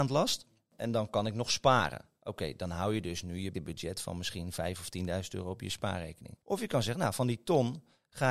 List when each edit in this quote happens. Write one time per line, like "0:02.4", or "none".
0:03.5
0:06.4